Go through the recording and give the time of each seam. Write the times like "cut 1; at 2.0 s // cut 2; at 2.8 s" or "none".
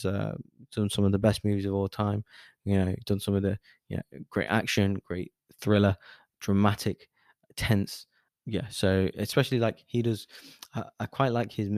cut 1; at 8.3 s